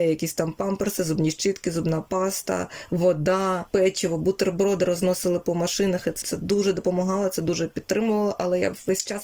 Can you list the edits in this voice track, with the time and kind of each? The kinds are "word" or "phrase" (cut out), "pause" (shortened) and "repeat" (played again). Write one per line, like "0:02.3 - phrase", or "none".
0:06.2 - word